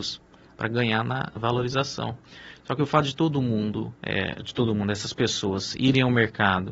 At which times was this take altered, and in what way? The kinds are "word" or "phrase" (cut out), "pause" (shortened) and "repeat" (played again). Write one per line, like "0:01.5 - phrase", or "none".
0:04.0 - pause